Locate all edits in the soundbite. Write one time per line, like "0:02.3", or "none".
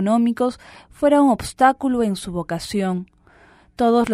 none